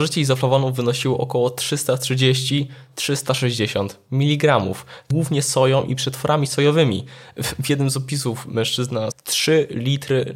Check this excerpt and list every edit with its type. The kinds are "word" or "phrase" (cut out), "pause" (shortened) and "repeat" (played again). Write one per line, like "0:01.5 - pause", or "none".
0:05.1 - phrase
0:09.1 - word